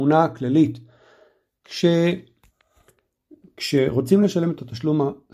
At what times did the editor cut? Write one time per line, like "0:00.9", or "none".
none